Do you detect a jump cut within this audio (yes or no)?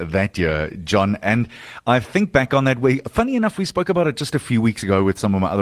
no